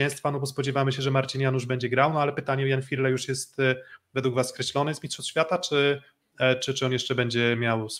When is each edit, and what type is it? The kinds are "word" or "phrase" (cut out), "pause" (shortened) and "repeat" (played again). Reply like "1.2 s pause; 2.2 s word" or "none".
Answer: none